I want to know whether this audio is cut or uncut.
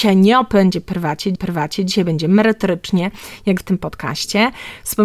cut